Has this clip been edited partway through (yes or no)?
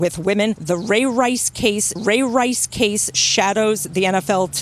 yes